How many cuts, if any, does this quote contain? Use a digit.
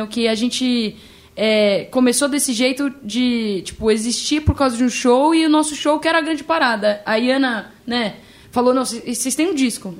0